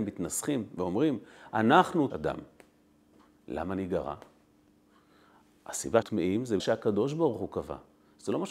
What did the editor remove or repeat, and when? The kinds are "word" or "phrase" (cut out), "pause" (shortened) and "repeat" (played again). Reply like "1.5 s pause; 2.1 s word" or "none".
2.1 s phrase; 6.0 s word; 6.6 s phrase